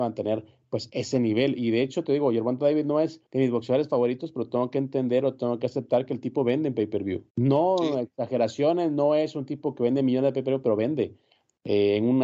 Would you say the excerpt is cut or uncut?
cut